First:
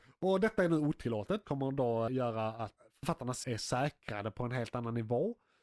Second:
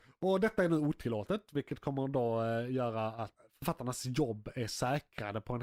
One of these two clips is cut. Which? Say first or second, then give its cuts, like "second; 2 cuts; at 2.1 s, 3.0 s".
first; 3 cuts; at 1.4 s, 2.1 s, 3.4 s